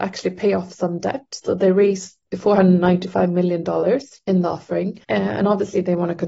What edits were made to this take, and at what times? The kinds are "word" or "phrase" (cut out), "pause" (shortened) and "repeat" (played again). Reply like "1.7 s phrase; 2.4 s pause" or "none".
2.2 s word; 5.0 s pause

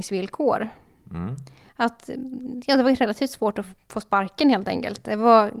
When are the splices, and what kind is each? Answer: none

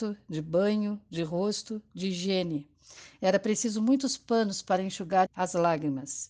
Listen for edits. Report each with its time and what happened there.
5.3 s word

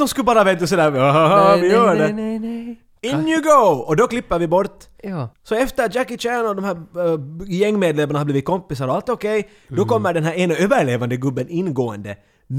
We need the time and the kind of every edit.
5.3 s pause

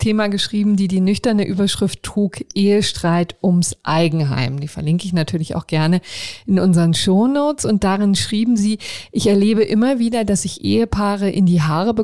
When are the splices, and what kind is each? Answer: none

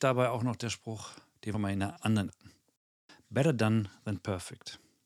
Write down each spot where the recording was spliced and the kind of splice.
1.5 s word; 2.3 s word

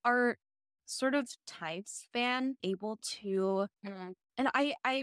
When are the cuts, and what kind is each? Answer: 2.6 s phrase; 3.8 s pause

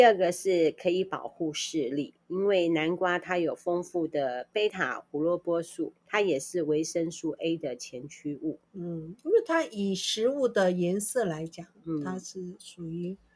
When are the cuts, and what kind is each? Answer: 2.2 s pause; 6.0 s pause; 8.7 s pause

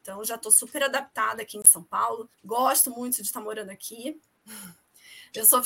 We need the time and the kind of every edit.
2.3 s pause

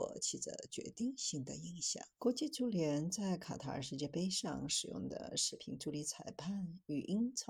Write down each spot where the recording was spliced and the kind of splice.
2.1 s pause

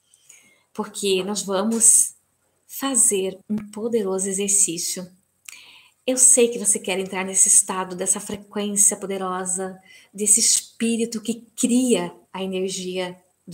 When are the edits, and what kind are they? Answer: 3.4 s pause

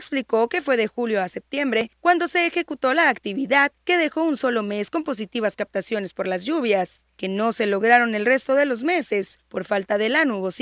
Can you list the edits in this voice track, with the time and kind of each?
none

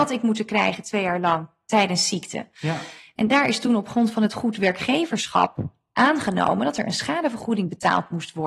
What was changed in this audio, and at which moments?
none

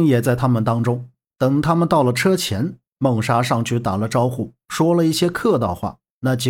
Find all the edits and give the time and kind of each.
none

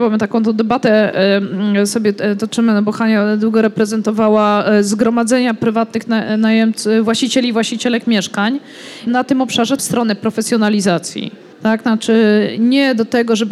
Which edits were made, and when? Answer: 9.1 s word; 9.8 s phrase; 11.5 s pause

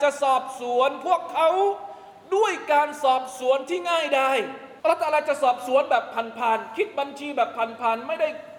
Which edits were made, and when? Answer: 4.8 s pause

